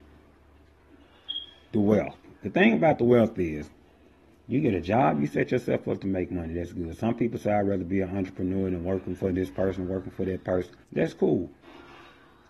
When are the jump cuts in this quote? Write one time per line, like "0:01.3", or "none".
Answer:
0:10.8